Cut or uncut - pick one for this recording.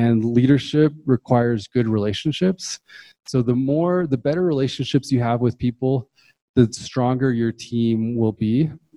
uncut